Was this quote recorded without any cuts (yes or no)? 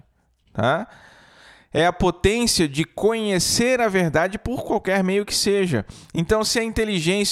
yes